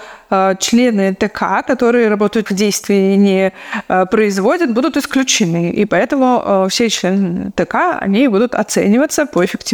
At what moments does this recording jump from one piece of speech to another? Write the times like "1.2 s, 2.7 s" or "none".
2.5 s